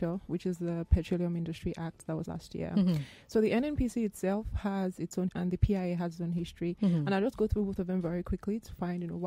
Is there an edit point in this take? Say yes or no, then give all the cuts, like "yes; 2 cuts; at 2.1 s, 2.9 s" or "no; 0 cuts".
yes; 2 cuts; at 2.3 s, 5.3 s